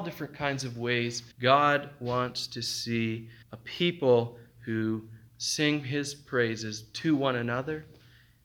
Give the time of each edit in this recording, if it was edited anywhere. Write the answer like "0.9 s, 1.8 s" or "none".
1.3 s, 3.4 s